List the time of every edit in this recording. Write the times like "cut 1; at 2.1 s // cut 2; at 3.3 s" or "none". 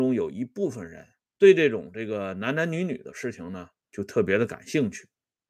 cut 1; at 1.2 s